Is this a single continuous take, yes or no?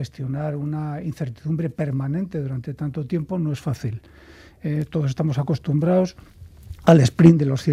yes